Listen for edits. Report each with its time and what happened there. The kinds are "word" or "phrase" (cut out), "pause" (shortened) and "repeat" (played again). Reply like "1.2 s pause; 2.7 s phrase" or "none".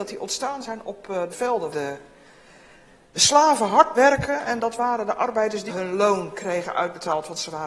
1.3 s word; 1.7 s word; 3.9 s word; 5.7 s word

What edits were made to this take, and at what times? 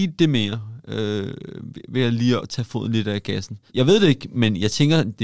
2.4 s word; 3.7 s pause

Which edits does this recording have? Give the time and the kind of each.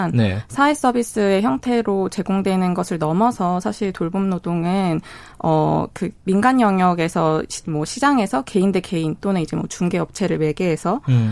none

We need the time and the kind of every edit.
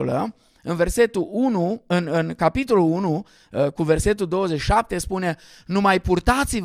none

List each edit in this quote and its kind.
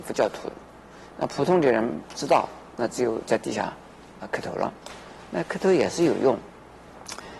4.2 s word

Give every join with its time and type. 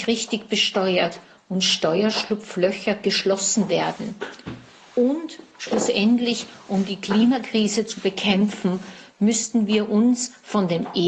none

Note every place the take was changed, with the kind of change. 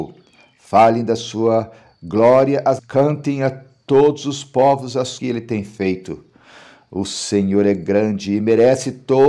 2.8 s word; 5.2 s phrase

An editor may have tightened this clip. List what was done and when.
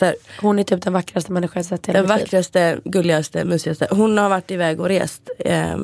none

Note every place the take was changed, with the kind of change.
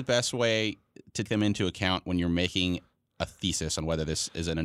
1.2 s word

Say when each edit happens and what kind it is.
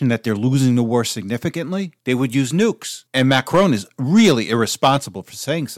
2.0 s pause; 3.1 s pause

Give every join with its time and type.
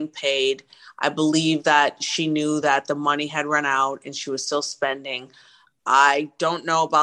none

